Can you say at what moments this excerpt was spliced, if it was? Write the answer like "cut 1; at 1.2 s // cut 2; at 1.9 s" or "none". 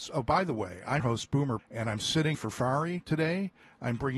cut 1; at 1.0 s // cut 2; at 1.6 s // cut 3; at 2.3 s